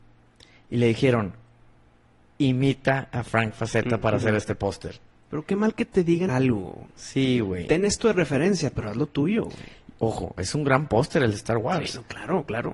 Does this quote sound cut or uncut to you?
cut